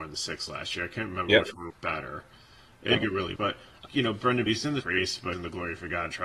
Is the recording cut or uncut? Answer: cut